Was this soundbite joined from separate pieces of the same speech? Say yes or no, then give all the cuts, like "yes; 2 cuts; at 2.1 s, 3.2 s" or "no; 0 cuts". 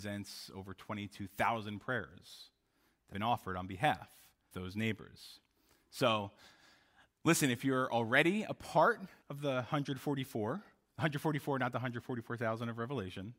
yes; 3 cuts; at 3.1 s, 4.5 s, 9.2 s